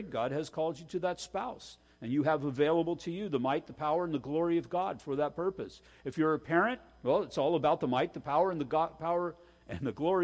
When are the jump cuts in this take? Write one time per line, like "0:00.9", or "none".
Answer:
none